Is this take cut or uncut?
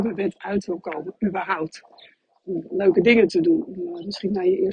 uncut